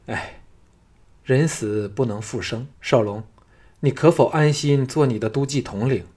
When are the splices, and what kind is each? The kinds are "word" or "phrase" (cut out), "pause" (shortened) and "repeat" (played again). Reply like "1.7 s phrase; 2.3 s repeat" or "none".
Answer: 2.7 s pause